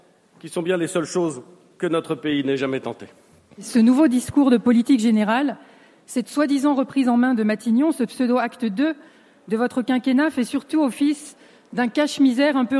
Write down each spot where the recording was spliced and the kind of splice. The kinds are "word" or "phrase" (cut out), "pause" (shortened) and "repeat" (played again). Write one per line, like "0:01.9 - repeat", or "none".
none